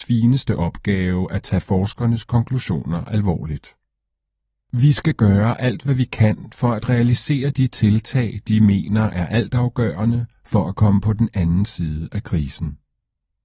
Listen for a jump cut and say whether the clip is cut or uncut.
uncut